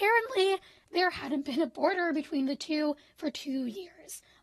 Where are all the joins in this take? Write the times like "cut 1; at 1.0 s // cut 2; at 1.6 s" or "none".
none